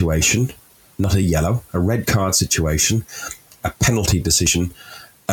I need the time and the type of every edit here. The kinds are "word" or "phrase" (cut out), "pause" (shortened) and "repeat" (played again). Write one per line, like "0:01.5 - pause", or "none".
none